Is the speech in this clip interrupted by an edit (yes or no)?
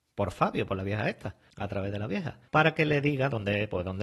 yes